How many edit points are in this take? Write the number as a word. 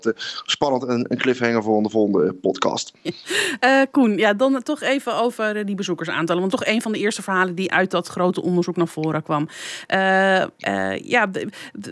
one